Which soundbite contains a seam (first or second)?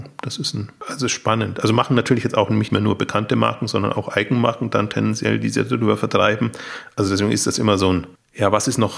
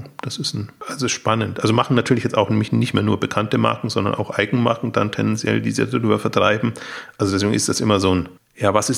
first